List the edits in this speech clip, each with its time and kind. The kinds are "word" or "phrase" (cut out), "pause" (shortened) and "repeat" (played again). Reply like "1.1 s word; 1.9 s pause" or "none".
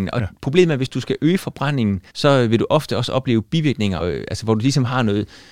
2.1 s pause; 4.0 s word